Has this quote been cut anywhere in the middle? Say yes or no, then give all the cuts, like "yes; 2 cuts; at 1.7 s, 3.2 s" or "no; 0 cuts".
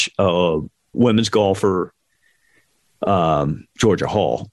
yes; 1 cut; at 0.9 s